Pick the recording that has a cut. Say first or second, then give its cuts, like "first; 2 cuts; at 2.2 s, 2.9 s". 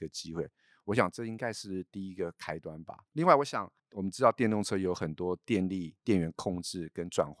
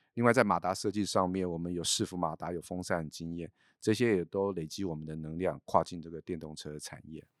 first; 3 cuts; at 3.1 s, 3.8 s, 6.0 s